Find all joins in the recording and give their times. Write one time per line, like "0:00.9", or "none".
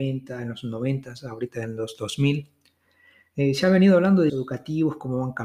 0:04.3